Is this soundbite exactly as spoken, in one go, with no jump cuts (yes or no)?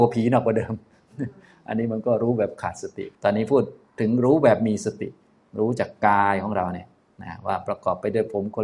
no